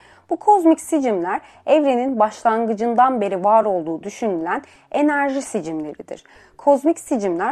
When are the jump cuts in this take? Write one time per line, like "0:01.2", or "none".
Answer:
none